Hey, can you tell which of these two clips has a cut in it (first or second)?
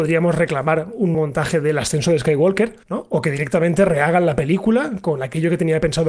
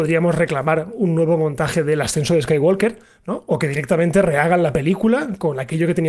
first